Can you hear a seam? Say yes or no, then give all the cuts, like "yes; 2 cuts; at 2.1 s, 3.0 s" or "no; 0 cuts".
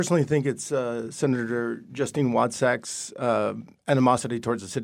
no; 0 cuts